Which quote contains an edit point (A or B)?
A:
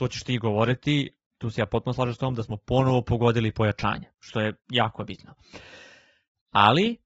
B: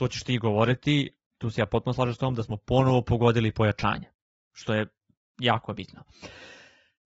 A